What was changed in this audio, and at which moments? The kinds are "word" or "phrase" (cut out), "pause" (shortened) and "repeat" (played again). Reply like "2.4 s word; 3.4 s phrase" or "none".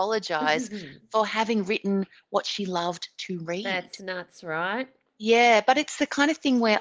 none